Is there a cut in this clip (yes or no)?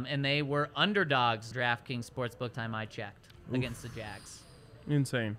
yes